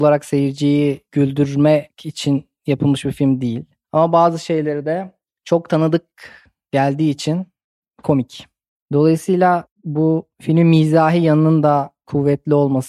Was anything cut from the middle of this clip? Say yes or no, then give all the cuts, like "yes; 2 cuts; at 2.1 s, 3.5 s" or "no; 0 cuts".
no; 0 cuts